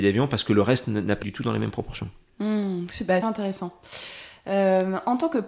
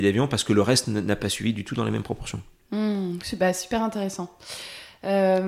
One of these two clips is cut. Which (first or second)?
first